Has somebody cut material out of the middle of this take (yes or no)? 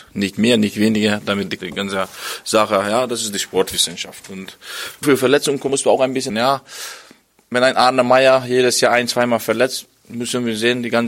yes